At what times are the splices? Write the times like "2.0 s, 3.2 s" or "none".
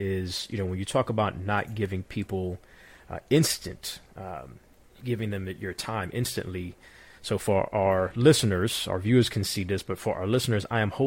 none